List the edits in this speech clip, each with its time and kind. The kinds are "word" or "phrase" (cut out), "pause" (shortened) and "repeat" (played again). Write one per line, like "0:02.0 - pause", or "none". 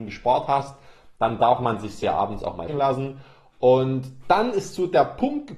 0:02.7 - word